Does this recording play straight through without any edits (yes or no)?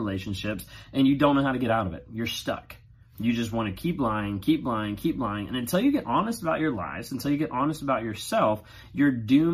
yes